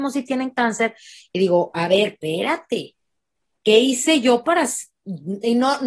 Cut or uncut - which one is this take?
uncut